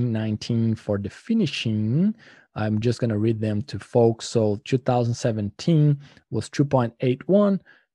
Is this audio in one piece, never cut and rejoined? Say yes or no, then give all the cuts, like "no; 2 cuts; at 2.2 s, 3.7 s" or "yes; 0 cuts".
yes; 0 cuts